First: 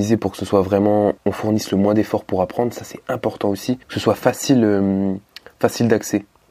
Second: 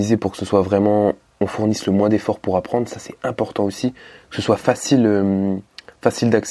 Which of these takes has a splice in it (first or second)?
first